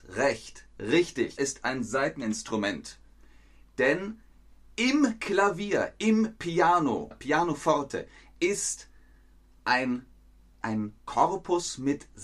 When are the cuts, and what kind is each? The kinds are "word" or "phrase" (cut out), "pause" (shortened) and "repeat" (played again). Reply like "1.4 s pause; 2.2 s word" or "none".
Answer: 1.4 s phrase; 7.1 s word; 10.6 s word